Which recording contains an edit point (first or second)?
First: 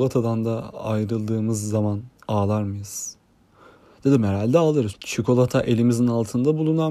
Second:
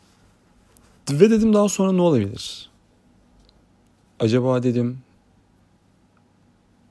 first